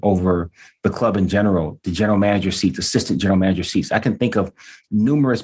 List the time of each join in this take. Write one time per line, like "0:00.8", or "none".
none